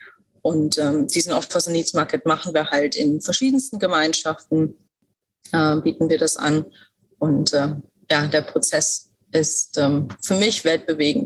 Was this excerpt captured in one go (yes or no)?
yes